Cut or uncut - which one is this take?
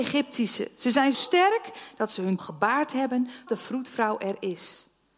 cut